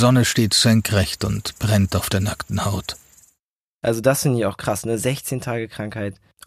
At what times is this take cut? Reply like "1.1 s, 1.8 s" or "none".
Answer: none